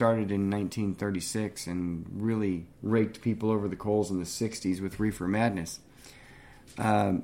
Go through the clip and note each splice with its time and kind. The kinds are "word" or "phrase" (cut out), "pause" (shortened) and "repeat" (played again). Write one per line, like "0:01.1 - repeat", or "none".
0:02.7 - pause